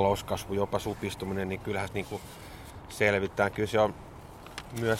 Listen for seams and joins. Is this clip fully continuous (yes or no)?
no